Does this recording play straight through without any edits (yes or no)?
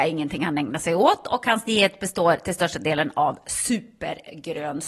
yes